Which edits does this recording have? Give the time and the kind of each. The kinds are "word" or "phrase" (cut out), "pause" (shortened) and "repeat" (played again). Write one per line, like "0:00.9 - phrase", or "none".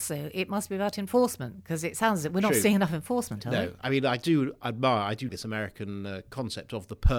0:05.3 - word

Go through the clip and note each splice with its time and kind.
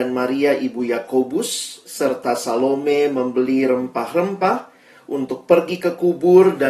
none

